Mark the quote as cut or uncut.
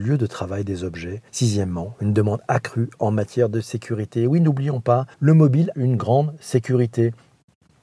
cut